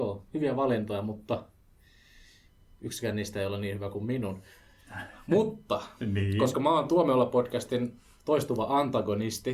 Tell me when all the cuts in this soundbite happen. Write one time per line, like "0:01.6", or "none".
none